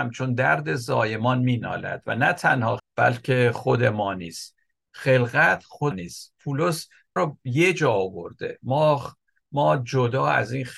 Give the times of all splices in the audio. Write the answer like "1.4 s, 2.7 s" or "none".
2.8 s, 5.9 s, 7.2 s